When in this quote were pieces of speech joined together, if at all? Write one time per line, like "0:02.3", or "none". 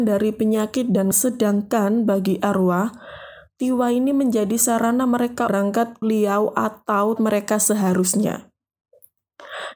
0:01.1
0:05.5
0:06.0
0:07.2